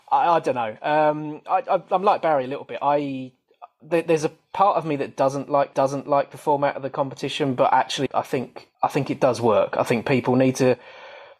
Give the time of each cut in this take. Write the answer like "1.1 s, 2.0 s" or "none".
5.7 s, 8.1 s, 8.7 s

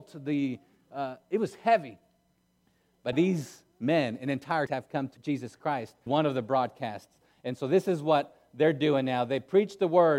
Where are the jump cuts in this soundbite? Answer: 3.1 s, 4.7 s, 5.2 s, 6.1 s

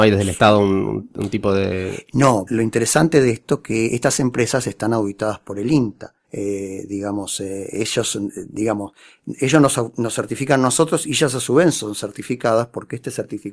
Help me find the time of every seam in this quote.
2.5 s, 3.9 s, 6.2 s

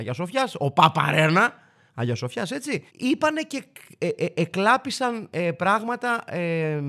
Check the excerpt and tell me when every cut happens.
2.9 s

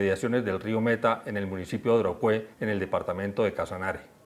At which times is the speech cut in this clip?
2.5 s

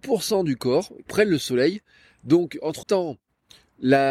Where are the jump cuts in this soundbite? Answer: 1.1 s, 2.8 s

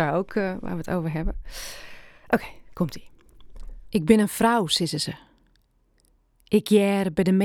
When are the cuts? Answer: none

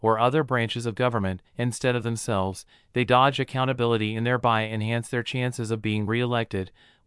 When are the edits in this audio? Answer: 1.5 s

